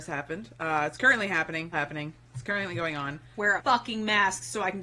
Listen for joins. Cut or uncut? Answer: cut